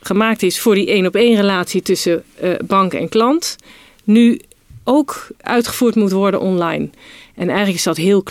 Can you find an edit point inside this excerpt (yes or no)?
no